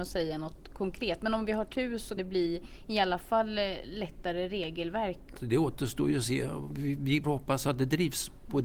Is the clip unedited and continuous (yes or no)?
no